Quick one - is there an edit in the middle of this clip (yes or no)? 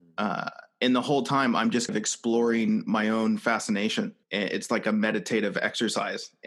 yes